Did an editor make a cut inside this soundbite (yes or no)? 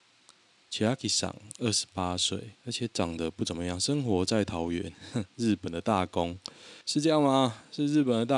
yes